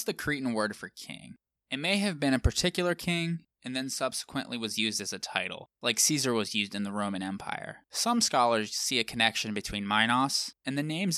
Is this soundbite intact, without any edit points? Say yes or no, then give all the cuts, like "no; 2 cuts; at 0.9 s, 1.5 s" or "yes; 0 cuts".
no; 3 cuts; at 1.5 s, 5.8 s, 7.8 s